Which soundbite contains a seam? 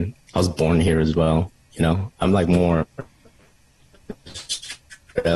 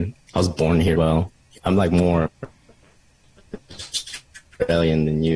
second; 2 cuts; at 0.9 s, 1.6 s

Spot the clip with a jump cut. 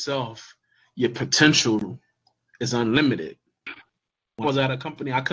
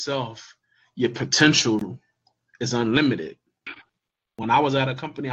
first; 1 cut; at 4.4 s

